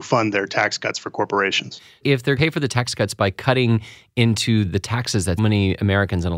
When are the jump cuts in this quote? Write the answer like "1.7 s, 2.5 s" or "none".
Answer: 2.4 s, 5.4 s